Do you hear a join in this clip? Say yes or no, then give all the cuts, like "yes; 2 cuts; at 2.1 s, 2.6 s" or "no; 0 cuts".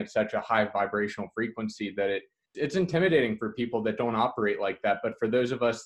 yes; 1 cut; at 2.5 s